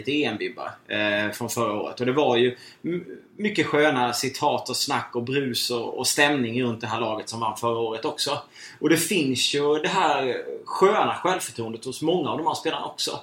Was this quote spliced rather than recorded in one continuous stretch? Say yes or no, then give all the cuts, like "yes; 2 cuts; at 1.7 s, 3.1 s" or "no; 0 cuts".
no; 0 cuts